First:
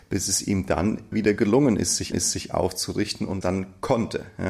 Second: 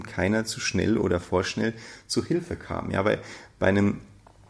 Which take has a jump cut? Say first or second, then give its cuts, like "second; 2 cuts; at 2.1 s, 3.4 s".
first; 3 cuts; at 1.1 s, 2.1 s, 3.4 s